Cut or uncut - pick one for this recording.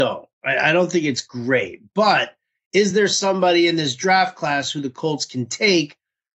uncut